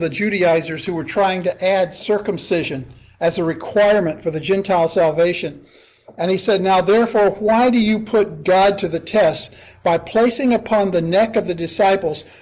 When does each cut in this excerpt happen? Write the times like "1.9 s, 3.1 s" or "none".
none